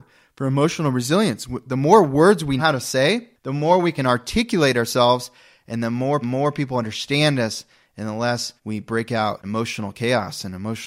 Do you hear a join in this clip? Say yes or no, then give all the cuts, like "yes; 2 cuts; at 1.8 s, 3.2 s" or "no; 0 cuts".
yes; 4 cuts; at 2.6 s, 6.2 s, 8.6 s, 9.4 s